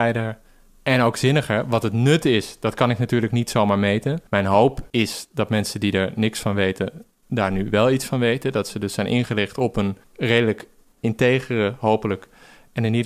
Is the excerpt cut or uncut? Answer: cut